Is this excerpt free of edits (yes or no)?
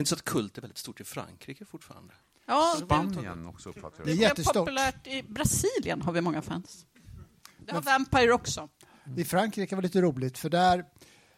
yes